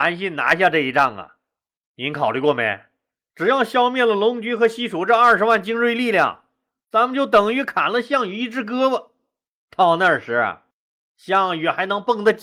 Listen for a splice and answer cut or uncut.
uncut